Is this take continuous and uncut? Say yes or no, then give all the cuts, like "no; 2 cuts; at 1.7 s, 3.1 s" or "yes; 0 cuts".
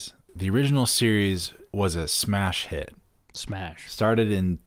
yes; 0 cuts